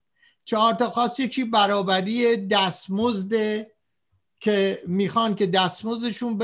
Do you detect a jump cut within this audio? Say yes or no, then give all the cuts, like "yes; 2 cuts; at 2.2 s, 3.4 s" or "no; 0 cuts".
no; 0 cuts